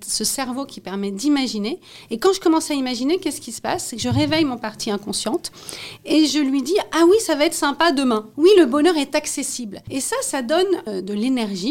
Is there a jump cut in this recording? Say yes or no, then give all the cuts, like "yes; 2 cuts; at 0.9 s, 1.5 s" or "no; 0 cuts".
yes; 1 cut; at 8.3 s